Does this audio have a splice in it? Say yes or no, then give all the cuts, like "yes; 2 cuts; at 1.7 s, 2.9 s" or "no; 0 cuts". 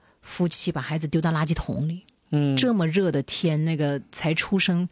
no; 0 cuts